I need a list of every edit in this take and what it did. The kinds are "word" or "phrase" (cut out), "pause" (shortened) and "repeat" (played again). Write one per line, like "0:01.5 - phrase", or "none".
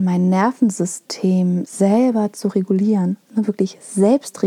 none